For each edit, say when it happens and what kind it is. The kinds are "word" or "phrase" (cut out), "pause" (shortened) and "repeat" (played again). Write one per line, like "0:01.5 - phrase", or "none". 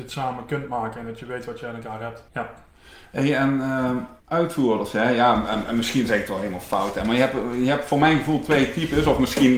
0:02.3 - pause
0:04.2 - pause

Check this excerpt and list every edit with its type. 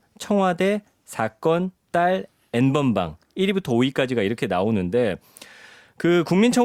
none

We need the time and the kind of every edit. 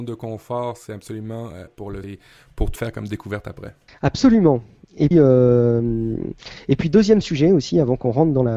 0:01.7 - word
0:02.0 - word
0:02.8 - phrase
0:03.9 - pause
0:05.1 - word

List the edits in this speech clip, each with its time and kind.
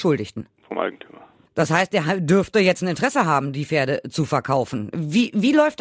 none

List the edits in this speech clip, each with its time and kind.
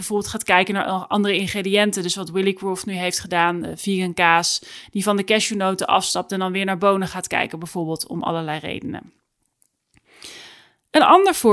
none

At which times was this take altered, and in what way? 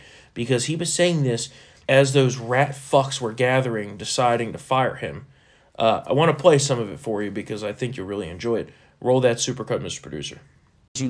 none

